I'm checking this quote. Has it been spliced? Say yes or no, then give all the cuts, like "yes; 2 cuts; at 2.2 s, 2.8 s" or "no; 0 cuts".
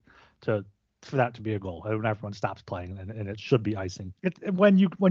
yes; 1 cut; at 4.2 s